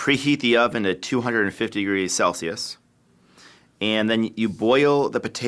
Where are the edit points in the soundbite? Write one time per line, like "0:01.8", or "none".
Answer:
none